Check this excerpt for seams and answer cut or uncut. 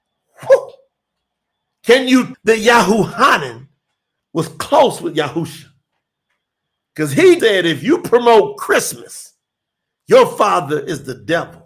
cut